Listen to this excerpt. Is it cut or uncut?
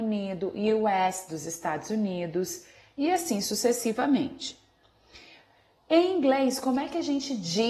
uncut